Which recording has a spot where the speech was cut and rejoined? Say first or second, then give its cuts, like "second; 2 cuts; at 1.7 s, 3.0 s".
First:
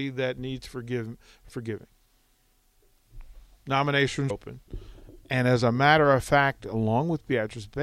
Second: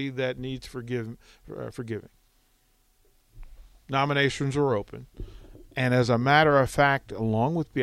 first; 2 cuts; at 1.5 s, 4.3 s